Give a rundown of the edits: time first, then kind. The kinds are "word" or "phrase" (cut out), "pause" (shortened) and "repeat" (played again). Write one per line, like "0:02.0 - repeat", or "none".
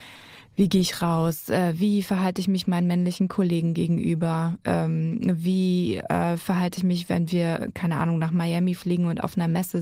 none